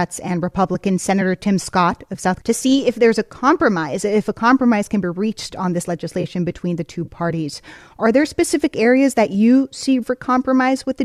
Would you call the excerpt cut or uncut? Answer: cut